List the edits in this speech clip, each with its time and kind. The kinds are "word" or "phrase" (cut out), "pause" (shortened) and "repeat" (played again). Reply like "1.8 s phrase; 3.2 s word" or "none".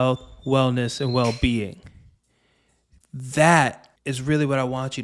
4.0 s pause